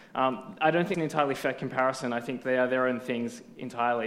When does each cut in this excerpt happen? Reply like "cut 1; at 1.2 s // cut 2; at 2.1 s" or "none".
cut 1; at 0.9 s // cut 2; at 2.4 s